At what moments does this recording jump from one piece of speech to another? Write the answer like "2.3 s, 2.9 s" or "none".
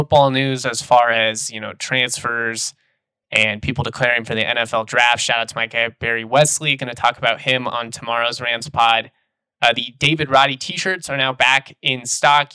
none